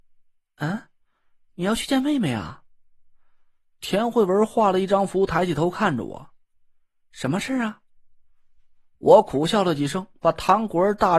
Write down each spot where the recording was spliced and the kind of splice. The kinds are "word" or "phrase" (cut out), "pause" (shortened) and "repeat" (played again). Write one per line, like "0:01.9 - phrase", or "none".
none